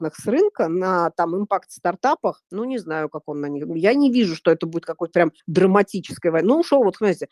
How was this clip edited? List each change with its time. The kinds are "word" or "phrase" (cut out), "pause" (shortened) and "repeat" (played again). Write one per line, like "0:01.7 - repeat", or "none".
0:02.5 - pause
0:05.4 - pause